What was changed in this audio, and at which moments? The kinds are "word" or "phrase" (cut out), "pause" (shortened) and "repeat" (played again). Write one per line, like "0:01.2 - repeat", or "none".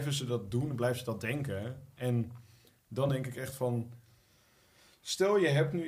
none